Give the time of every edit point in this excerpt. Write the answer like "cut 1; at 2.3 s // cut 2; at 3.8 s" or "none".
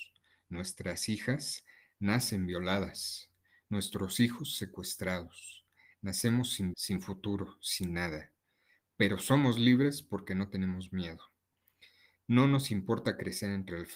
cut 1; at 6.7 s